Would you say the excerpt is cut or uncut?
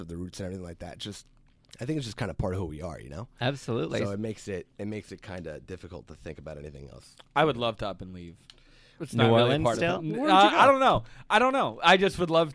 uncut